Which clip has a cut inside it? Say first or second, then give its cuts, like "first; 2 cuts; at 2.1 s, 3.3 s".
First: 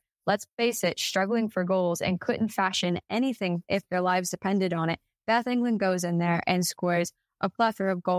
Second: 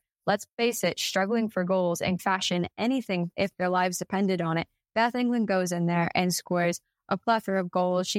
second; 1 cut; at 2.2 s